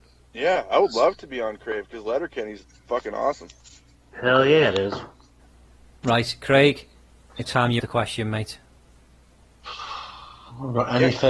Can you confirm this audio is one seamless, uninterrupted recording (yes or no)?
no